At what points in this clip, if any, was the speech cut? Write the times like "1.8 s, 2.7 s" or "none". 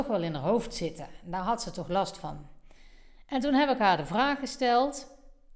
none